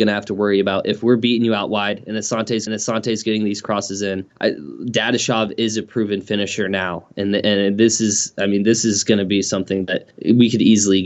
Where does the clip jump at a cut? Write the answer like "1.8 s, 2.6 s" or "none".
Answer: 2.7 s, 4.3 s, 10.1 s